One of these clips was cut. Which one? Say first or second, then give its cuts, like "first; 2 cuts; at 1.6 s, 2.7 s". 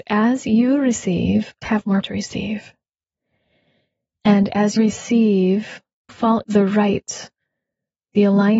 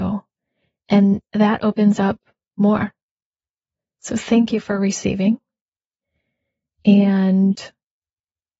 first; 5 cuts; at 1.6 s, 2.0 s, 4.8 s, 6.1 s, 6.4 s